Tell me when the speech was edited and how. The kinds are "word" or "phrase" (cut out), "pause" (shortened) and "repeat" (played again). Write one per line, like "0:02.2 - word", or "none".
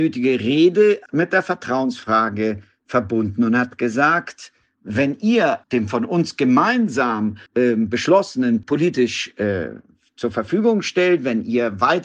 0:01.1 - word
0:05.6 - pause
0:07.5 - pause
0:08.6 - phrase